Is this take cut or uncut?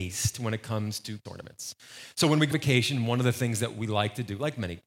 cut